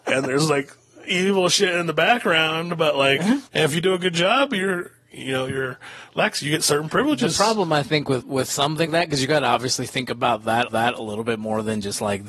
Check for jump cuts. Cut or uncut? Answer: cut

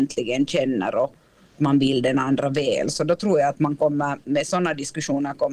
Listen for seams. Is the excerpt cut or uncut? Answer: uncut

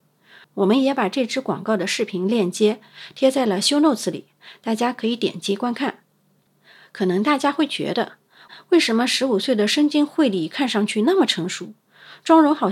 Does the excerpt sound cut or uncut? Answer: uncut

